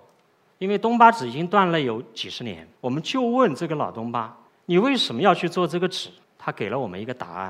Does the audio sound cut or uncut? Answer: cut